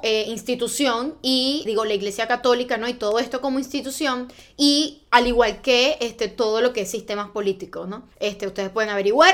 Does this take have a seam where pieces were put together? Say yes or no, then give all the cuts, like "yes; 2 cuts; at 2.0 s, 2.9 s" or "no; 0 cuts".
yes; 2 cuts; at 1.7 s, 8.1 s